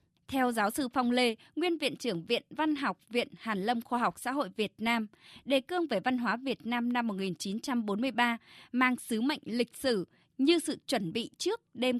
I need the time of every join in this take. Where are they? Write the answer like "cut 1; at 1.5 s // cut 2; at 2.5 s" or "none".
none